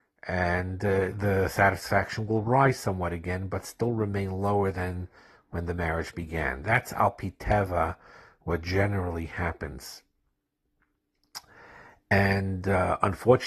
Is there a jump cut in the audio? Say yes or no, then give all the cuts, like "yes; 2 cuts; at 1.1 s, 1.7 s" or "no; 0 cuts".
no; 0 cuts